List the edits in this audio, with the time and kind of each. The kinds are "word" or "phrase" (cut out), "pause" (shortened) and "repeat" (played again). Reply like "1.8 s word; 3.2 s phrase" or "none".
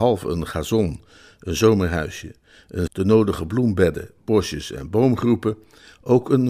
2.9 s word